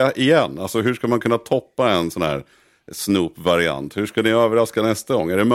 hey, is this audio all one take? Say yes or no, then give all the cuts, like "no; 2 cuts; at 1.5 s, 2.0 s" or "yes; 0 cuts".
yes; 0 cuts